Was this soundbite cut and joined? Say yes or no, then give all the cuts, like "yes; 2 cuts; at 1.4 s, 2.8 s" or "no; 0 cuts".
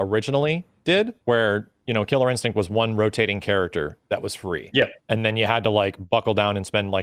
yes; 2 cuts; at 1.2 s, 5.0 s